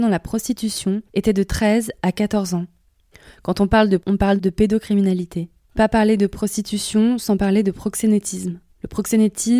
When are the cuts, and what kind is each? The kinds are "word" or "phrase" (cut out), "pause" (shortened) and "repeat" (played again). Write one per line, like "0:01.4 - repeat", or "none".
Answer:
0:01.1 - pause
0:03.1 - pause
0:04.0 - word
0:04.4 - phrase
0:05.8 - phrase